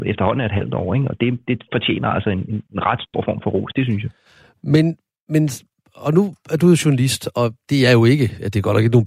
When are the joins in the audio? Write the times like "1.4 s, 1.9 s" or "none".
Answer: none